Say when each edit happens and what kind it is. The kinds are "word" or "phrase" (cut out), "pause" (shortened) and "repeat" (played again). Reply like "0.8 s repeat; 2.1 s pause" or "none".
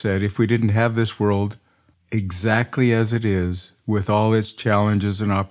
1.9 s pause